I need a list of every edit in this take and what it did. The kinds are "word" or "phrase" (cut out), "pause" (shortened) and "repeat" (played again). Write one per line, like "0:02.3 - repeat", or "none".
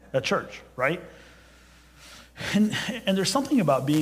none